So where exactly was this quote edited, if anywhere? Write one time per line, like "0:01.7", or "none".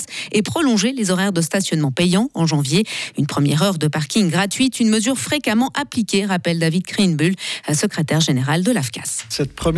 none